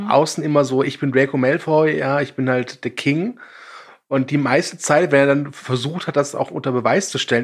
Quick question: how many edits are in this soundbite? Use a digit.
0